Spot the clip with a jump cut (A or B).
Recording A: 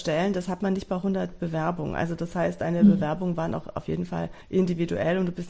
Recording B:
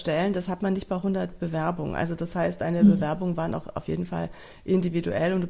A